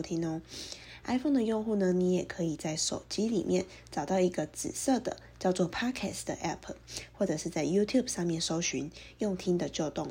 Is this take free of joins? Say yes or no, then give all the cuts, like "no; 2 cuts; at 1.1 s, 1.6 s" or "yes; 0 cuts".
yes; 0 cuts